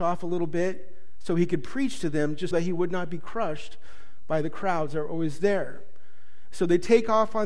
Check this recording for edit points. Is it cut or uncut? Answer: cut